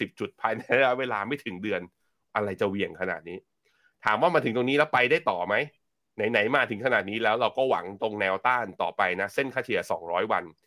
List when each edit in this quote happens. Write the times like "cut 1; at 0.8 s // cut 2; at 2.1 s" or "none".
none